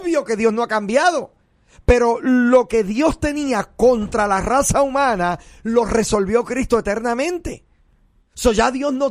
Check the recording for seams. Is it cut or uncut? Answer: uncut